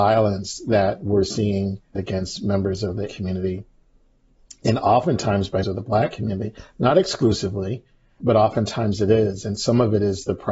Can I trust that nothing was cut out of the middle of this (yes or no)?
no